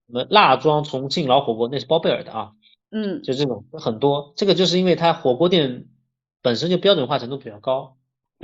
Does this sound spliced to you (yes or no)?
no